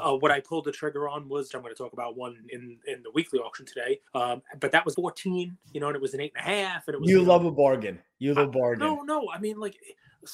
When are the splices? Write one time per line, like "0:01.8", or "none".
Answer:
0:01.5
0:04.1
0:04.9
0:05.6
0:08.4